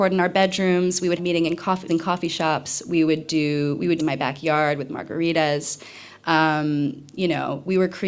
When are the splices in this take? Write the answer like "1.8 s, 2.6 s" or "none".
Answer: 1.2 s, 1.9 s, 4.0 s